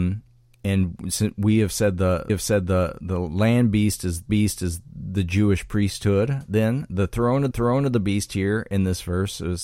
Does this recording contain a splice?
yes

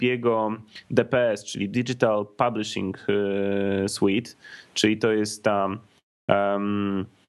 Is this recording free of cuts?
yes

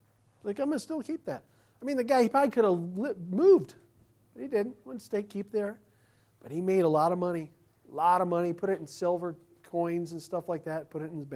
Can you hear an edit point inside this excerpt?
no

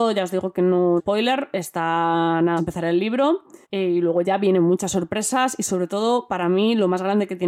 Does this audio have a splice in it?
yes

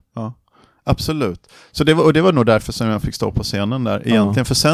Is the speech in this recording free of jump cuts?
yes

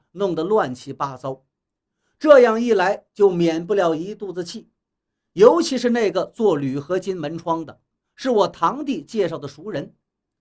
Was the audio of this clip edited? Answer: no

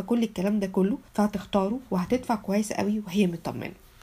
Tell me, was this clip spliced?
yes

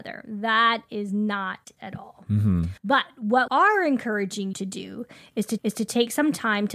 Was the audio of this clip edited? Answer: yes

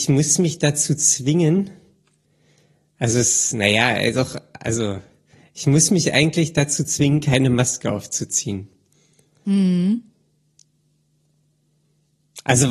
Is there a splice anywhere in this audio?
no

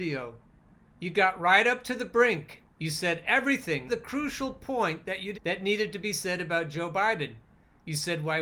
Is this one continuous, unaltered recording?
no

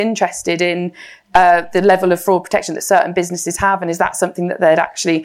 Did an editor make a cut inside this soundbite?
no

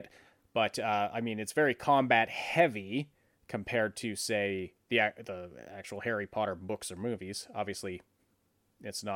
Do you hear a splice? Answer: no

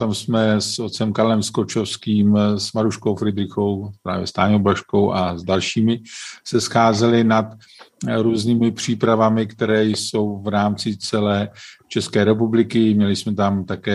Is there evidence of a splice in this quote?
no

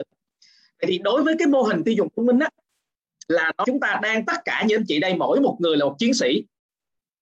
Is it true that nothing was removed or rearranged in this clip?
no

